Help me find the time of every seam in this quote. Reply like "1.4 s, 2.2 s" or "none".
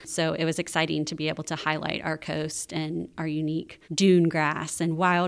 3.8 s